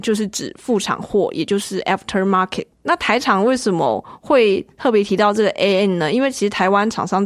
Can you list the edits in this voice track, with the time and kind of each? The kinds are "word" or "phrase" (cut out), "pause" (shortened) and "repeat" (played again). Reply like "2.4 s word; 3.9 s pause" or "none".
2.7 s pause